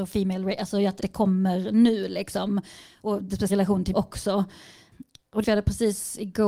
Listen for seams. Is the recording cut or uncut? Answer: cut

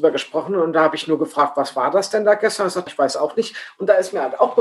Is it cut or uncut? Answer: cut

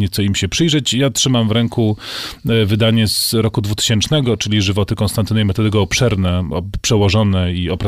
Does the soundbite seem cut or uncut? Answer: uncut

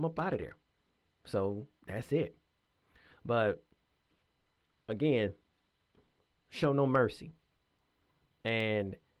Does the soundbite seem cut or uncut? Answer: uncut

